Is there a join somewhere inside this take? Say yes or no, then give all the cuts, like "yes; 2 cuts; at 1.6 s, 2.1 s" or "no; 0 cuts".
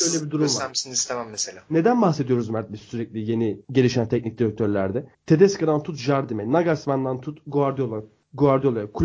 yes; 2 cuts; at 3.6 s, 5.1 s